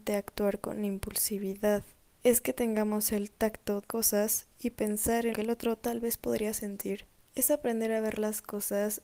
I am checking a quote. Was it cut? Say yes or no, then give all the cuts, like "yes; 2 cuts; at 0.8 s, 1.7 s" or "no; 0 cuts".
yes; 3 cuts; at 2.0 s, 3.8 s, 5.3 s